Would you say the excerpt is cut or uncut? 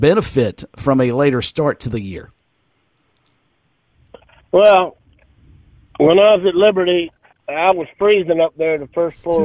uncut